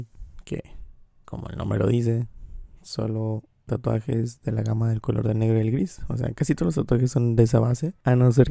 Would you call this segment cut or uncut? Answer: cut